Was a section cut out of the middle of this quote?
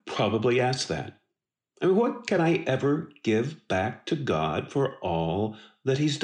no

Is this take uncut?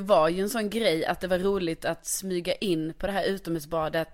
yes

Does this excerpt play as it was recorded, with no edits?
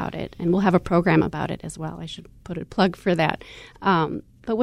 yes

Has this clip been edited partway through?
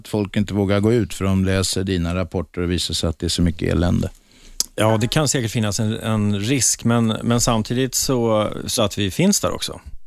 yes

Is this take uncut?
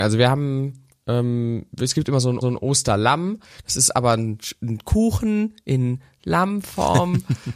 no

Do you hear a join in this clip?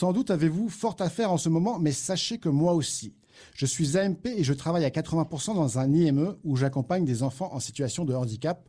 no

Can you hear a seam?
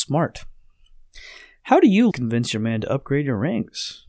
yes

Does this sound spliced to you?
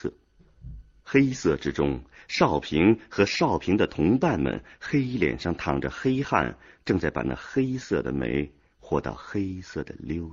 no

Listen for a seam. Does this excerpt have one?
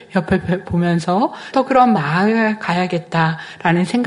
yes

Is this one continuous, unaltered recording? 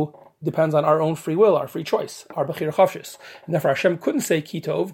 yes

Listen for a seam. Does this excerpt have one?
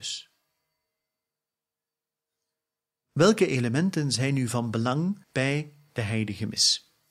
yes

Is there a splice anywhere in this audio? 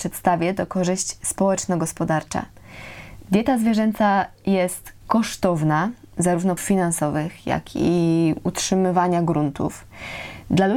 yes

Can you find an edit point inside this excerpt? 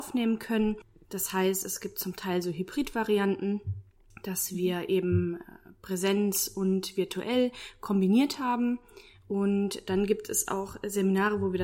no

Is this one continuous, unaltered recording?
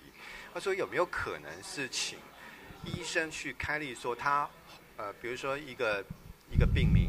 yes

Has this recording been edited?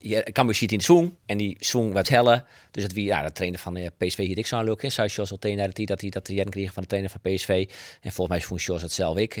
yes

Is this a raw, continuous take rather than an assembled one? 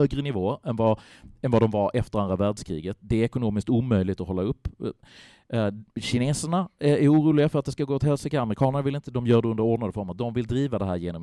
yes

